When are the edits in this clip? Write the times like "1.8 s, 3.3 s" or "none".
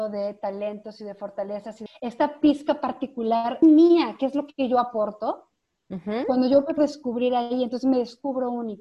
1.9 s, 3.6 s, 6.8 s